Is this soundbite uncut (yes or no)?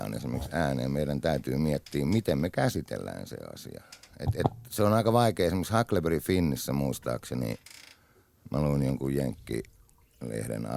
yes